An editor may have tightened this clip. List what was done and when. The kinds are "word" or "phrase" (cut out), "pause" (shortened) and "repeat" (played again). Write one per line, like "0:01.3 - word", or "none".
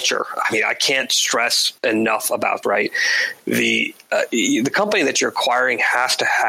0:01.8 - pause
0:02.6 - word